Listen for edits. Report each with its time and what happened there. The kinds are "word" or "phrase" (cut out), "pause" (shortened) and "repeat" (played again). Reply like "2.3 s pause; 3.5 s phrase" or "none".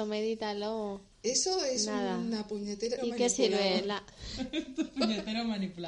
1.1 s pause; 3.0 s phrase